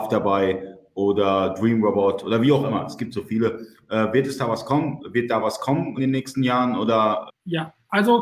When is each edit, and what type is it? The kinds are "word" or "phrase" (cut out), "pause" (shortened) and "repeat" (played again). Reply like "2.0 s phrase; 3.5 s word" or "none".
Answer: 6.0 s word; 7.3 s word